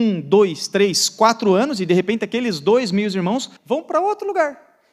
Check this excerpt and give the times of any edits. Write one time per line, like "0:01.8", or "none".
0:03.6